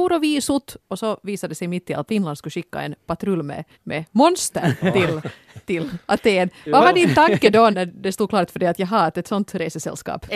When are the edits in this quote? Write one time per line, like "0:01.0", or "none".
0:02.1
0:03.7
0:07.7